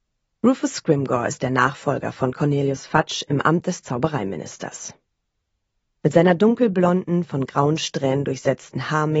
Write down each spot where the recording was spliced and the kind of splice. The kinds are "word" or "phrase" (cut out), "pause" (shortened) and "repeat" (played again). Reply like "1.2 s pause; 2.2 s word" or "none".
none